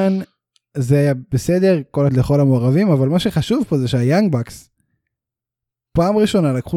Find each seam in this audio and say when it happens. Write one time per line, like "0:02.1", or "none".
0:02.1